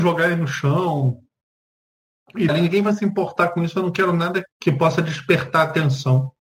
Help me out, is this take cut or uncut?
cut